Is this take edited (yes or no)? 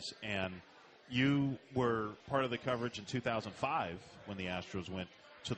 yes